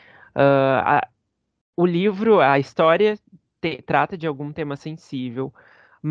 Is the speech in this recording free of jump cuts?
yes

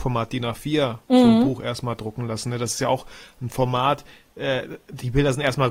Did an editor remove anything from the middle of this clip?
no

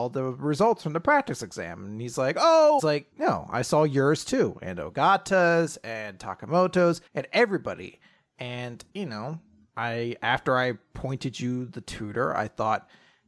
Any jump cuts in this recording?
yes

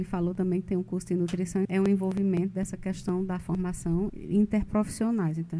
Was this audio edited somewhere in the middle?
yes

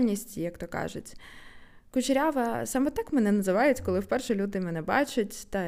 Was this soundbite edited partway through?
no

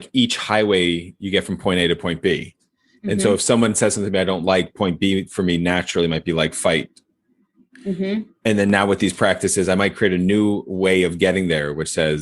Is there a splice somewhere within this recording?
no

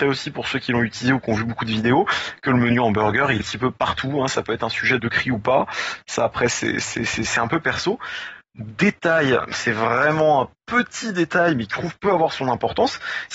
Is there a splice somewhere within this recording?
yes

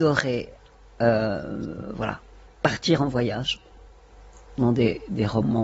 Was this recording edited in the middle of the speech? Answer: no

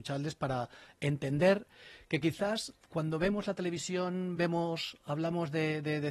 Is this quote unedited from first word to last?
yes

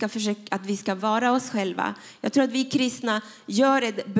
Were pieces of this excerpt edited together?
no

